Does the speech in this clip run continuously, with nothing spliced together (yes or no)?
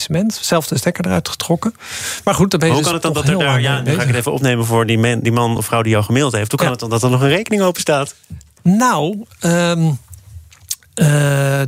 yes